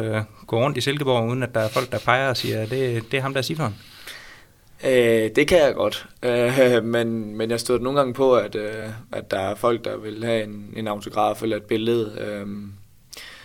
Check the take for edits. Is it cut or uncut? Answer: uncut